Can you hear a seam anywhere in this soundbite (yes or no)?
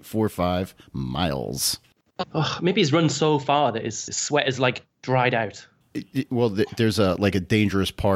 yes